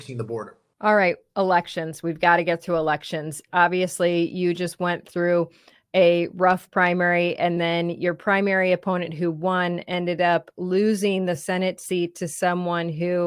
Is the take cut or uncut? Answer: uncut